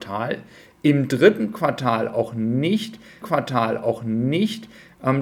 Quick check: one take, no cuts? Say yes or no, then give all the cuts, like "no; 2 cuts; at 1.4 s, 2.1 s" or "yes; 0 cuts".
no; 1 cut; at 3.2 s